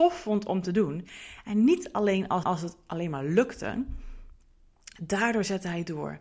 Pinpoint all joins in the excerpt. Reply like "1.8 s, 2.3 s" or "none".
2.4 s